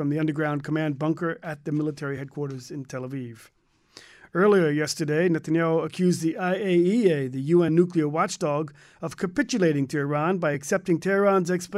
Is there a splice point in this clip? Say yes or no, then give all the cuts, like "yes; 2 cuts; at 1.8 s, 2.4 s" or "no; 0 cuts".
no; 0 cuts